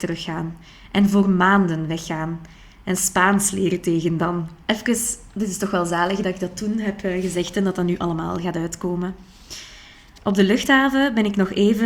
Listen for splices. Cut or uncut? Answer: cut